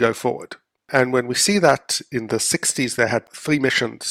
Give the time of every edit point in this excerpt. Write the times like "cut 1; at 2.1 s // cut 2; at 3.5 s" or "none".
none